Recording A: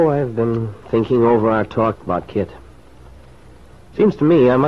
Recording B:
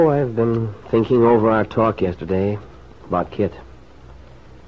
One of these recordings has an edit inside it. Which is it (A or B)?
A